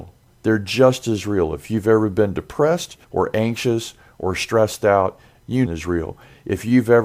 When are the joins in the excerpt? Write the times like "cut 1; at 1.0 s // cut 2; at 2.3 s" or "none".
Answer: cut 1; at 3.0 s // cut 2; at 5.7 s